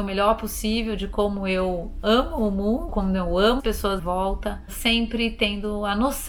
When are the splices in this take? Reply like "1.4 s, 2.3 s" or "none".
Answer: 2.9 s, 3.6 s, 4.0 s